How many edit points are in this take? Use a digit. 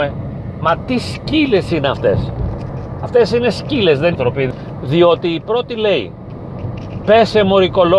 1